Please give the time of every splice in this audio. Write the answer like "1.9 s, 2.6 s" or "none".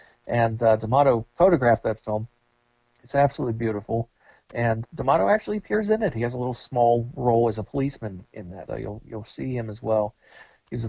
4.8 s, 8.7 s